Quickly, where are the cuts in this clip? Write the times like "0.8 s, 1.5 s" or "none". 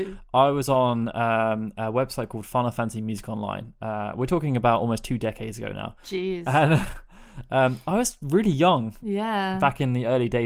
none